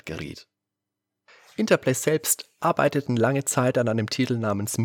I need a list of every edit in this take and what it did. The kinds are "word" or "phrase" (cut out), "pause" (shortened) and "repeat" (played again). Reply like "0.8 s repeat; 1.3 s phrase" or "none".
none